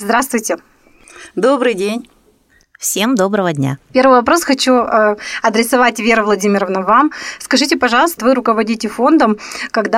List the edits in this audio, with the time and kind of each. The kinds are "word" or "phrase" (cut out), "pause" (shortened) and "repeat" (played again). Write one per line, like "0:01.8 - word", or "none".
0:08.2 - word